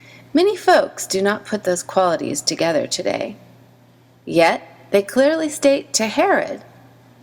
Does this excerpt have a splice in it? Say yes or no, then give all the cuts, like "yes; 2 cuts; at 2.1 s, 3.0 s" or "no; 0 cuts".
no; 0 cuts